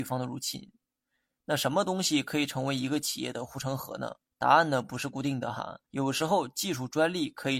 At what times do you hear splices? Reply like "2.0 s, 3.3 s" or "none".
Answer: 4.3 s, 5.9 s